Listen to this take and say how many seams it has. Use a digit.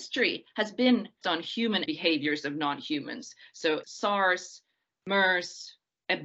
3